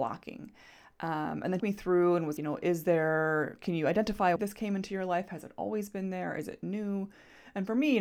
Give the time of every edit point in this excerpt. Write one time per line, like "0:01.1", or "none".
0:01.6
0:02.4
0:04.4